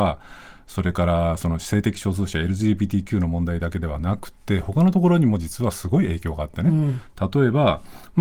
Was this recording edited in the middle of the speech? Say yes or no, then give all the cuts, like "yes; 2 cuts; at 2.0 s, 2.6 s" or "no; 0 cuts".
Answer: no; 0 cuts